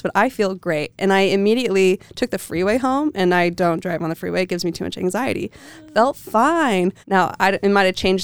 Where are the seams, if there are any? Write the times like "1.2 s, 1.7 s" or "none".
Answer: 7.0 s